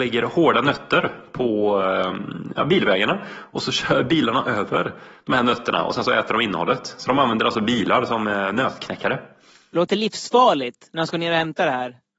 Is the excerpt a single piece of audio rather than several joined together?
yes; 0 cuts

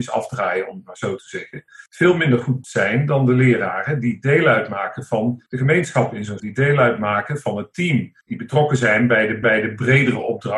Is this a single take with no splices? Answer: no; 6 cuts; at 1.9 s, 2.6 s, 5.5 s, 6.4 s, 8.2 s, 9.4 s

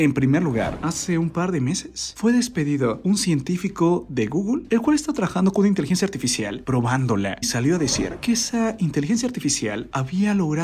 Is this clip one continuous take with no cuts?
no; 1 cut; at 7.4 s

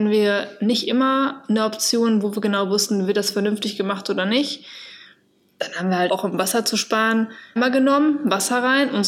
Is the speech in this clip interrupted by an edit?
yes; 2 cuts; at 6.1 s, 7.6 s

